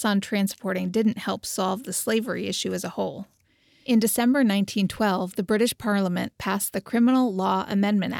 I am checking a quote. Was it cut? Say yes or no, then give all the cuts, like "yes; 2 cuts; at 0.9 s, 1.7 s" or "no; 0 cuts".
no; 0 cuts